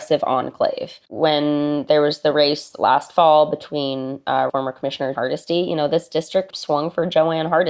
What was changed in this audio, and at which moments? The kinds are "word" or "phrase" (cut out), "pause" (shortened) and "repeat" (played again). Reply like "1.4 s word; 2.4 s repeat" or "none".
1.0 s pause; 4.5 s phrase; 5.1 s word; 6.5 s word